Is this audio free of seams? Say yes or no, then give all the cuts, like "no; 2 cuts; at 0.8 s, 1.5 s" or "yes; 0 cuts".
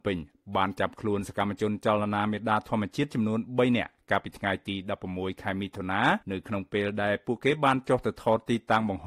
no; 1 cut; at 6.2 s